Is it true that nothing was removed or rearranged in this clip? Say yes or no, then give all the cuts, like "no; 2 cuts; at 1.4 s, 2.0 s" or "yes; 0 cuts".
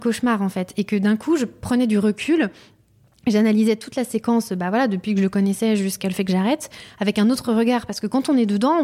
yes; 0 cuts